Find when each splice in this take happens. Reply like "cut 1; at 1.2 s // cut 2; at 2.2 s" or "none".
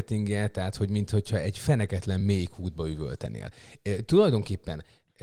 none